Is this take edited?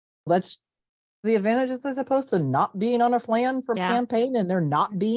yes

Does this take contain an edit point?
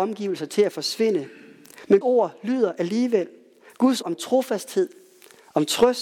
yes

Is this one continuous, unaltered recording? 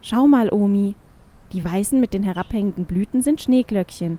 yes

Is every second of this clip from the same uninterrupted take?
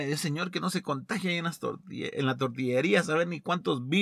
yes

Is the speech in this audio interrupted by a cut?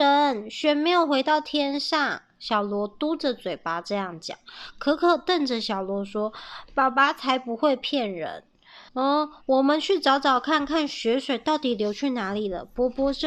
yes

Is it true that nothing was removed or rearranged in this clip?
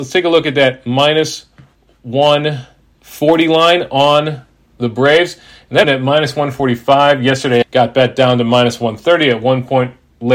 no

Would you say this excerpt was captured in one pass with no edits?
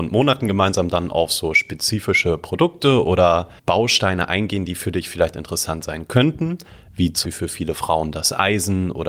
no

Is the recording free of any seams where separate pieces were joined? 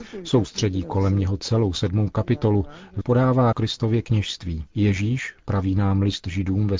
no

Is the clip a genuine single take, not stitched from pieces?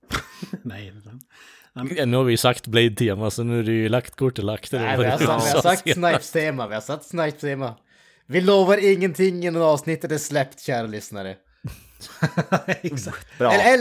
yes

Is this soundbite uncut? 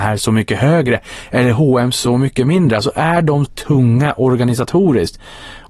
no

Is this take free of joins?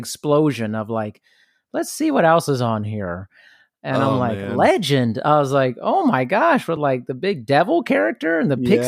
yes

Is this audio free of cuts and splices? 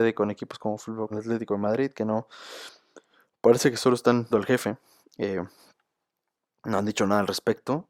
no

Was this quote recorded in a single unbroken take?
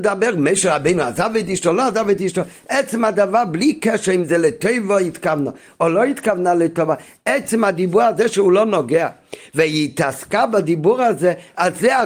yes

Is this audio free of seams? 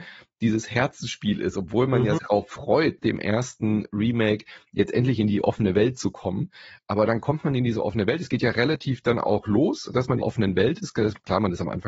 no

